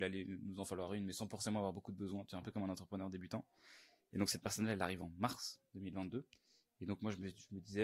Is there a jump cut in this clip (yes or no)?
no